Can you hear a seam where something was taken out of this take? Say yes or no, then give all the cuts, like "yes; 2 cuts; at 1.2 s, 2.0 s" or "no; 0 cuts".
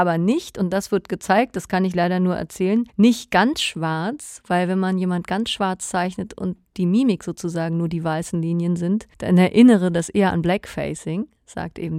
yes; 2 cuts; at 2.9 s, 9.1 s